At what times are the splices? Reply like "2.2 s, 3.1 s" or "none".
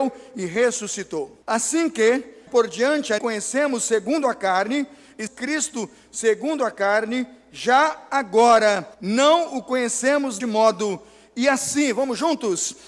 1.4 s, 2.5 s, 3.2 s, 5.3 s, 8.9 s, 10.4 s

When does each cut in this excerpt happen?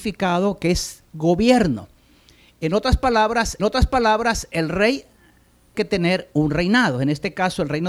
1.1 s, 3.6 s, 5.7 s

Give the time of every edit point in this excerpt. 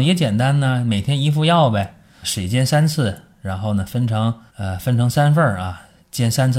2.2 s, 4.5 s

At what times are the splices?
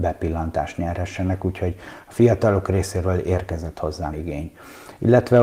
4.1 s

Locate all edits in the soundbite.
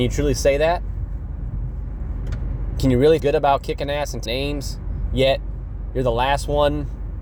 3.2 s, 4.3 s

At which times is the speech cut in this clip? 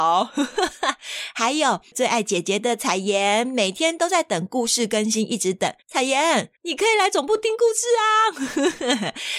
5.8 s, 6.6 s

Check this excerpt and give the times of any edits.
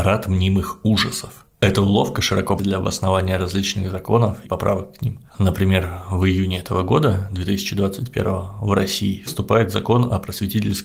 1.5 s, 2.6 s, 4.4 s, 5.3 s, 9.3 s

